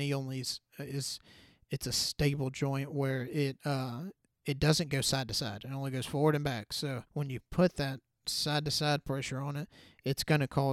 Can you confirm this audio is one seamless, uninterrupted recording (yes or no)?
no